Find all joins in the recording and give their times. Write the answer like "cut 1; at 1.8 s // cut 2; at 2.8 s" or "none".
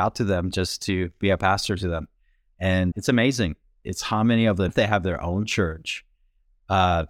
cut 1; at 2.9 s // cut 2; at 4.7 s